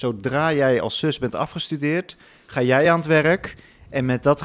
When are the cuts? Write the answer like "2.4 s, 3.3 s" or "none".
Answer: none